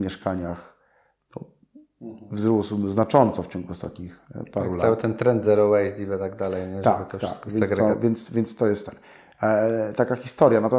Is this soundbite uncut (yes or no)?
yes